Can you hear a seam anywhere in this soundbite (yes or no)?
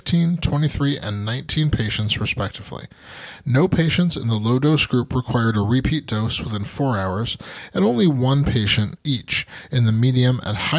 no